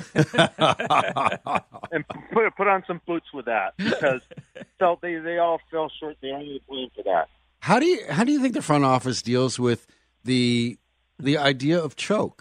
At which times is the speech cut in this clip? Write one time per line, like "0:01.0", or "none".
none

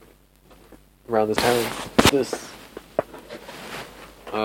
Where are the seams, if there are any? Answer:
0:01.4
0:02.1

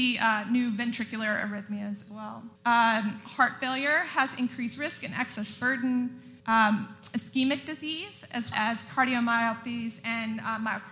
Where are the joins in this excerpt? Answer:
0:02.1
0:02.6
0:06.4
0:08.5

